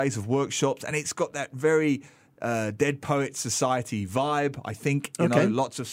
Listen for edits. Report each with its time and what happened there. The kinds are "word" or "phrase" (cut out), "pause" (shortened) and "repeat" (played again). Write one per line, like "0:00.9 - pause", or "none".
none